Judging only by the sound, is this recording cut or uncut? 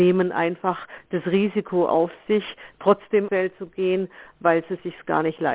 cut